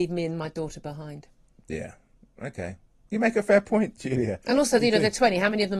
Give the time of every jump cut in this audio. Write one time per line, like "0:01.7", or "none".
none